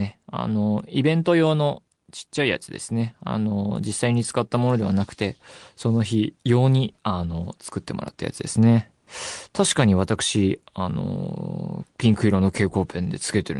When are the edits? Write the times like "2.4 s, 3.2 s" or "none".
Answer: 6.4 s, 7.0 s